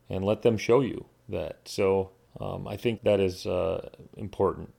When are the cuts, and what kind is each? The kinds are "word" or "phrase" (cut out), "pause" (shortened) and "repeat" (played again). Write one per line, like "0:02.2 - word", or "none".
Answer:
0:02.3 - pause
0:03.0 - phrase